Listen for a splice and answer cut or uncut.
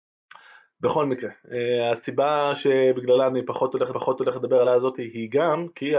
cut